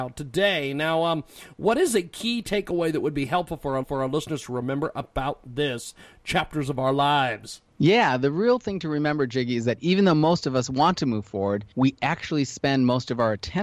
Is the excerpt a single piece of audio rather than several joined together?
no; 3 cuts; at 3.8 s, 7.7 s, 11.7 s

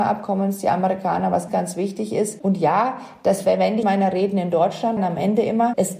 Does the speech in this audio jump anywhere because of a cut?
yes; 3 cuts; at 1.5 s, 3.8 s, 5.0 s

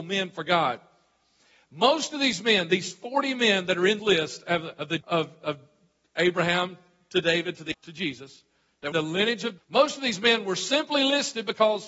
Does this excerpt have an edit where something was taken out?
yes; 5 cuts; at 4.0 s, 5.0 s, 7.7 s, 8.9 s, 9.6 s

